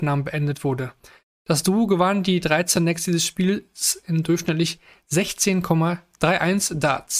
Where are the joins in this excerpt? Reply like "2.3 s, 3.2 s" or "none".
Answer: none